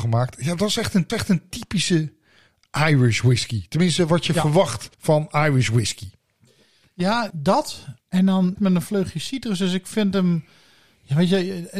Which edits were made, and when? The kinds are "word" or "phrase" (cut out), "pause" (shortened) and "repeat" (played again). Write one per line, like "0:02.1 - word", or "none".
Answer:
0:01.1 - repeat
0:04.9 - pause
0:07.3 - word
0:08.0 - pause
0:08.6 - word